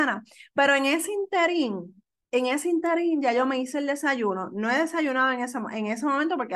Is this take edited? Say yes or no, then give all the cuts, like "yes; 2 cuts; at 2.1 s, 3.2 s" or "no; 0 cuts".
no; 0 cuts